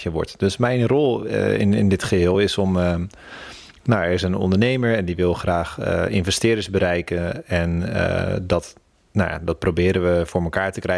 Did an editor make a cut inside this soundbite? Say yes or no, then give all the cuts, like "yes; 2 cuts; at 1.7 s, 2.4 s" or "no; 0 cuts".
no; 0 cuts